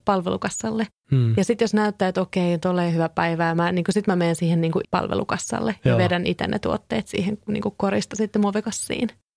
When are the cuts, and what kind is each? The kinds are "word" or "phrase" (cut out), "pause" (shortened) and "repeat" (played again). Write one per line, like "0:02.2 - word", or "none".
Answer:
0:04.8 - word